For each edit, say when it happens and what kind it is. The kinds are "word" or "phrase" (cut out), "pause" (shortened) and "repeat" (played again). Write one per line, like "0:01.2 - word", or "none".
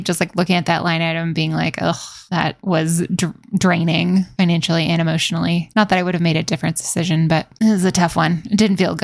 none